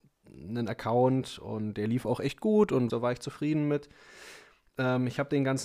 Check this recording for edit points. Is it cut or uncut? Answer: cut